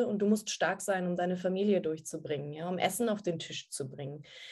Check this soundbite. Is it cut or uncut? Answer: uncut